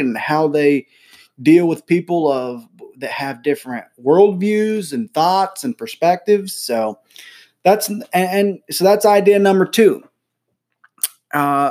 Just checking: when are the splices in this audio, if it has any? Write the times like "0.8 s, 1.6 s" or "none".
none